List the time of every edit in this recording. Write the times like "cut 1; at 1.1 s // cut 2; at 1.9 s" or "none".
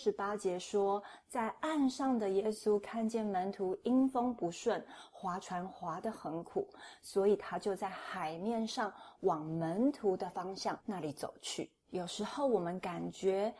cut 1; at 11.8 s